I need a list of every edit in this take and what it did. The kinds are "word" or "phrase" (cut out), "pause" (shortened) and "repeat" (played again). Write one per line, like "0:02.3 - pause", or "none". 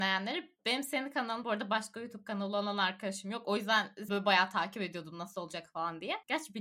0:01.4 - phrase
0:04.1 - word